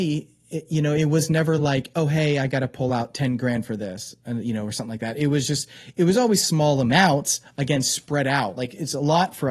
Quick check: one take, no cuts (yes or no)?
yes